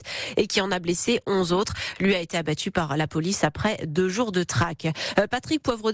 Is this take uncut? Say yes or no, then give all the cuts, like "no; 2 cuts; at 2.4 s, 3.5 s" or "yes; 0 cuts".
yes; 0 cuts